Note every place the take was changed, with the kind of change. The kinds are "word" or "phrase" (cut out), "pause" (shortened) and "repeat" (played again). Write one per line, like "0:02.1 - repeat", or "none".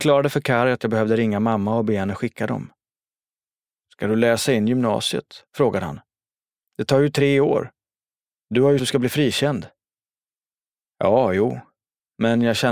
0:05.5 - pause
0:08.8 - phrase